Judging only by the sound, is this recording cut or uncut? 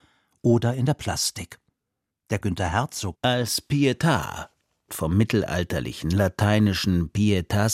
cut